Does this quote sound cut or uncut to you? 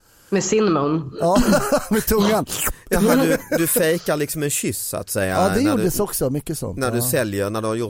uncut